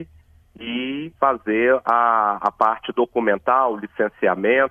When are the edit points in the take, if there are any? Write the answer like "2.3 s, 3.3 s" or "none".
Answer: 1.1 s